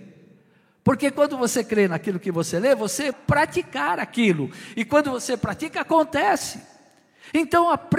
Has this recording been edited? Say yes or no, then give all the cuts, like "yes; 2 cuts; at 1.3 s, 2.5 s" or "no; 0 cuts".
yes; 1 cut; at 3.1 s